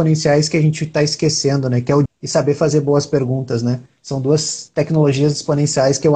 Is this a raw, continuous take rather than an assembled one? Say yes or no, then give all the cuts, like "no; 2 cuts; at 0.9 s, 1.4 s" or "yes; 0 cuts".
no; 1 cut; at 2.1 s